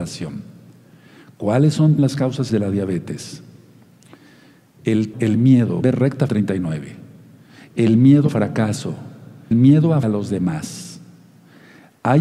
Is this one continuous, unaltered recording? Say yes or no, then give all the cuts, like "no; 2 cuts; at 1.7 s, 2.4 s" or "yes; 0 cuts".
no; 8 cuts; at 2.0 s, 2.5 s, 5.1 s, 5.8 s, 6.3 s, 8.3 s, 9.5 s, 10.0 s